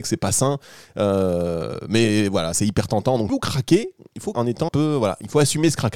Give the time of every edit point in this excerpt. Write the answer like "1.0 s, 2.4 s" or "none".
2.5 s, 3.3 s, 4.3 s, 4.7 s